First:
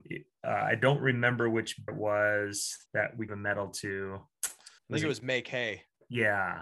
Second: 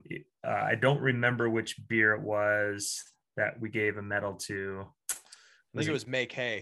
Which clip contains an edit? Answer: first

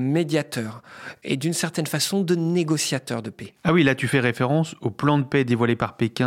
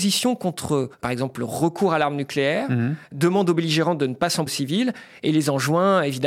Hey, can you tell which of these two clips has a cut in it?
second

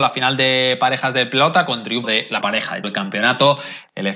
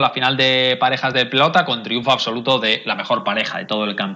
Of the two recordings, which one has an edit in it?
first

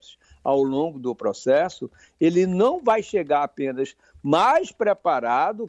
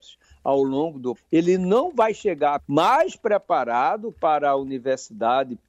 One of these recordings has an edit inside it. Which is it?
second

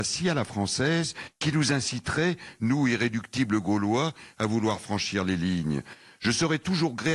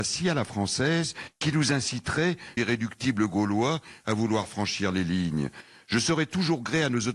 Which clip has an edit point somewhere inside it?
second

